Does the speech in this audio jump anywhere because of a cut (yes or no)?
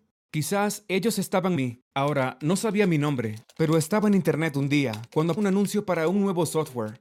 yes